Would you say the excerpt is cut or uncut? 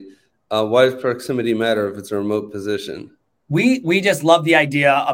uncut